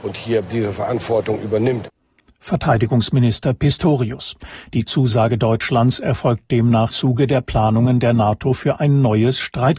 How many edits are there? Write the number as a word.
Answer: one